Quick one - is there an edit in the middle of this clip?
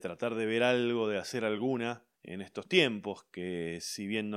yes; 1 cut; at 2.1 s

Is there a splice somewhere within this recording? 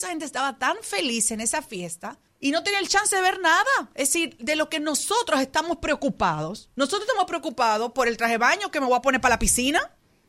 yes; 1 cut; at 2.3 s

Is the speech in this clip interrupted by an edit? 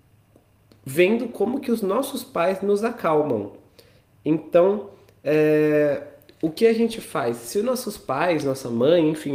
no; 0 cuts

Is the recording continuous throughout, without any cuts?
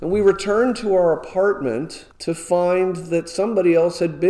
no; 1 cut; at 2.1 s

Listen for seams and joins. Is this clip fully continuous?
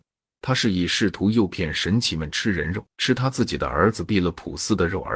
no; 1 cut; at 2.9 s

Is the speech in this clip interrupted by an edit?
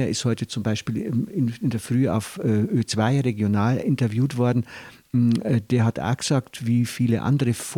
no; 0 cuts

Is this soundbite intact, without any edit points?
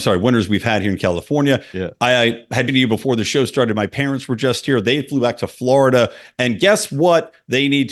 no; 1 cut; at 2.7 s

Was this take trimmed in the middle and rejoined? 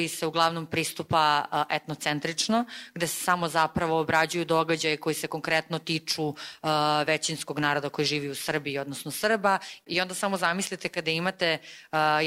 no; 0 cuts

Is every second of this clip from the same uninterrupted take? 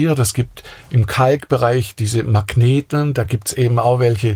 yes; 0 cuts

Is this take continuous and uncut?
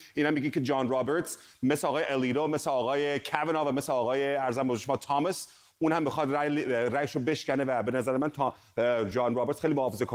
yes; 0 cuts

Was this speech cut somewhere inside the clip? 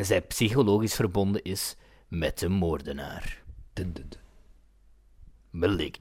no; 0 cuts

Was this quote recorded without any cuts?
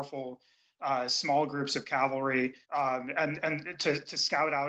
no; 1 cut; at 2.6 s

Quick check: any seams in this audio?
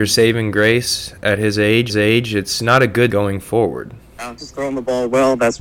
yes; 3 cuts; at 1.9 s, 3.1 s, 4.4 s

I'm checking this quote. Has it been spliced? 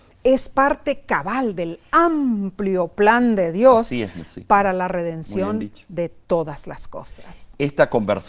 no; 0 cuts

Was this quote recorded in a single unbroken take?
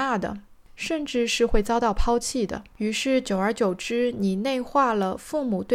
no; 1 cut; at 2.7 s

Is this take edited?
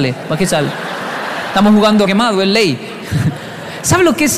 yes; 1 cut; at 2.1 s

